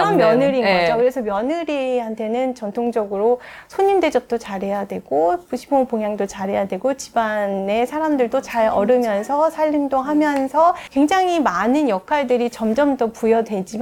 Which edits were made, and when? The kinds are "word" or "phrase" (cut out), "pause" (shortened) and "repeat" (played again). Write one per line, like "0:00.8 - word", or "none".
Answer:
none